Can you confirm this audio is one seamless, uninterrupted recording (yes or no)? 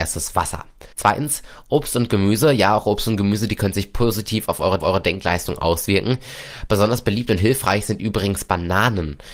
no